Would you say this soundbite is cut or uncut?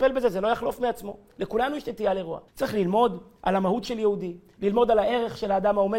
cut